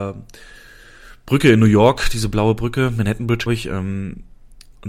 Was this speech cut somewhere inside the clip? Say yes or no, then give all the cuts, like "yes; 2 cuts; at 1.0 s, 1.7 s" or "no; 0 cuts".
yes; 1 cut; at 3.5 s